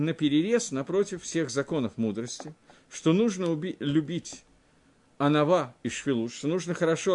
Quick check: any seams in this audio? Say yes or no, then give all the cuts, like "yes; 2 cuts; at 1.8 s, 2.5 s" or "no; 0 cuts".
no; 0 cuts